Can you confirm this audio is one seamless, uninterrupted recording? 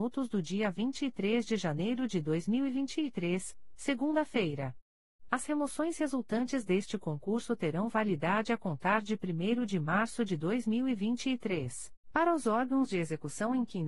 no; 1 cut; at 12.0 s

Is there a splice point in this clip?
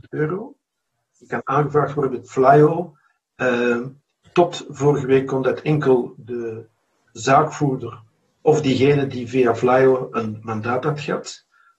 no; 0 cuts

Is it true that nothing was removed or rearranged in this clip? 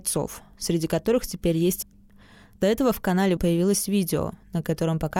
no; 2 cuts; at 1.8 s, 3.4 s

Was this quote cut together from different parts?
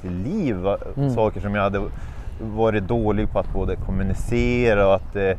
no; 0 cuts

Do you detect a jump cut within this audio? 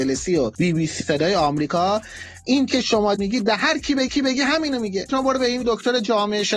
yes; 6 cuts; at 1.0 s, 2.7 s, 3.2 s, 4.1 s, 5.1 s, 5.6 s

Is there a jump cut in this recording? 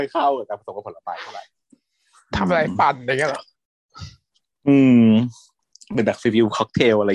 yes; 2 cuts; at 4.4 s, 5.6 s

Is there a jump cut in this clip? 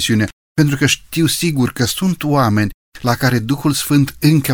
no; 0 cuts

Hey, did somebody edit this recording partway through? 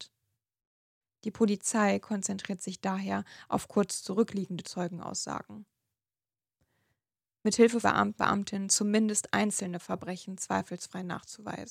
yes; 3 cuts; at 4.6 s, 7.8 s, 8.2 s

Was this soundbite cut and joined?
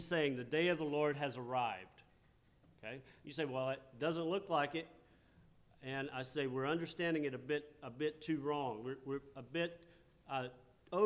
no; 0 cuts

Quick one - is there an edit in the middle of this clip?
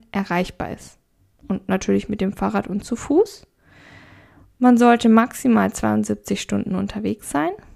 no; 0 cuts

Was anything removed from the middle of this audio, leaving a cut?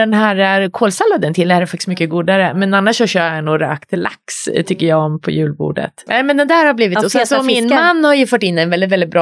no; 0 cuts

